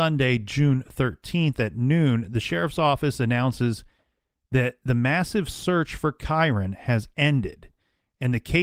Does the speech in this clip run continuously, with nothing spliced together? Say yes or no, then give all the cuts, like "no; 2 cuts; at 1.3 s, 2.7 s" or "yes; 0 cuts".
yes; 0 cuts